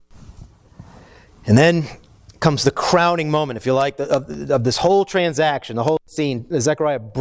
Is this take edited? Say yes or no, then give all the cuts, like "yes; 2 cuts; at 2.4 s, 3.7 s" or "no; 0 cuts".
no; 0 cuts